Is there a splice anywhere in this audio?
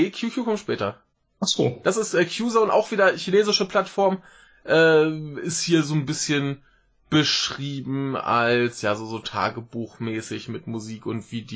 no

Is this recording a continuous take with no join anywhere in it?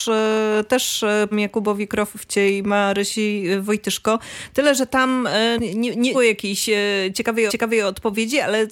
no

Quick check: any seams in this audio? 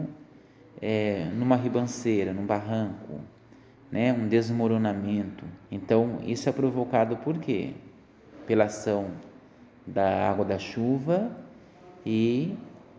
yes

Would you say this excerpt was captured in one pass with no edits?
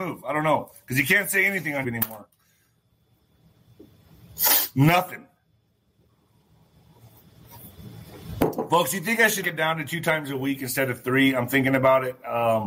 no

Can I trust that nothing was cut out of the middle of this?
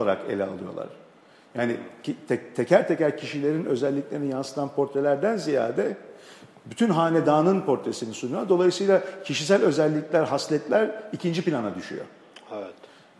yes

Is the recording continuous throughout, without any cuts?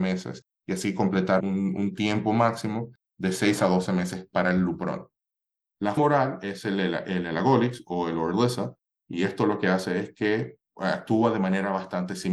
no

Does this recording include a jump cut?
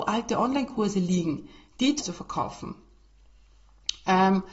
yes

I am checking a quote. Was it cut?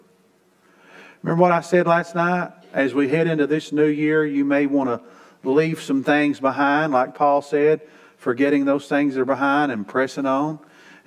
no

